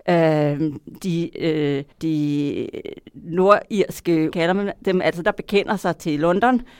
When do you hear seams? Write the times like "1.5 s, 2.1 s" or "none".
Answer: 1.9 s, 4.3 s, 5.2 s